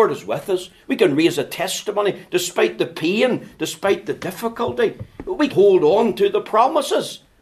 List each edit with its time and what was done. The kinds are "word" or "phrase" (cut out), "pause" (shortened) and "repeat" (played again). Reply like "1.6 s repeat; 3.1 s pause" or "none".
5.5 s word